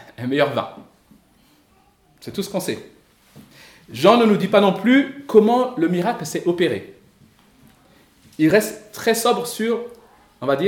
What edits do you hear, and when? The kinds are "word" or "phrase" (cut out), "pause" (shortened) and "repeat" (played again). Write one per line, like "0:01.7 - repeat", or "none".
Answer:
none